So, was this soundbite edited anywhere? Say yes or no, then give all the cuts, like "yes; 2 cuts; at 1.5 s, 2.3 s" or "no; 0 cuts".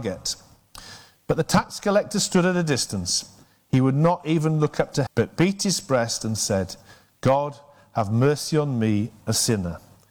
yes; 1 cut; at 5.1 s